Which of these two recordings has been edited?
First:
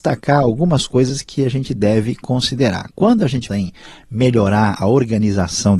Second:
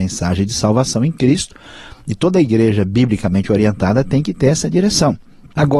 first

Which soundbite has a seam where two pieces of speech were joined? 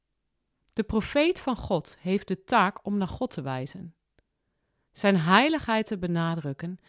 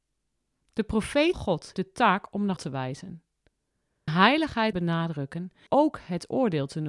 second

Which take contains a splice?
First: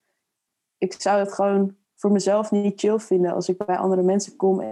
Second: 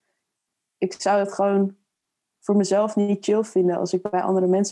first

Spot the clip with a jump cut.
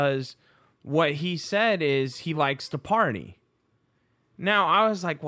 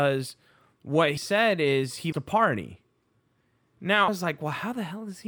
second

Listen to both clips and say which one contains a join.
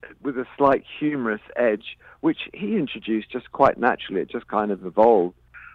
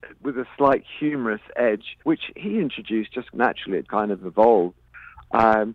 second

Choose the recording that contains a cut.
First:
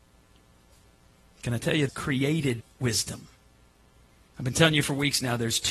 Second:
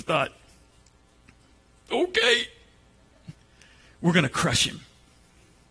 first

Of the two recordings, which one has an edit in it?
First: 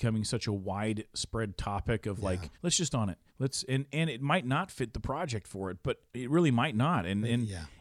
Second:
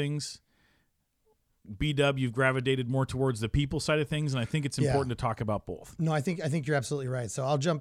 first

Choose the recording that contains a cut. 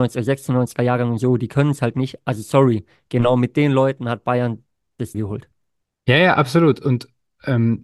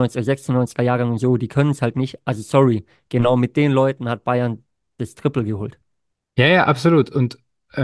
first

